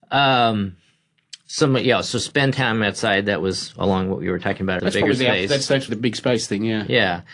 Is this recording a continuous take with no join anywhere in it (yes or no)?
no